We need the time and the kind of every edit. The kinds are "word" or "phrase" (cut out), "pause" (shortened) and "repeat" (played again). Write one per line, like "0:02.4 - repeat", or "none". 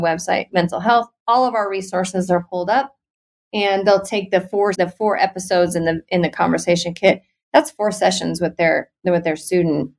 0:04.7 - word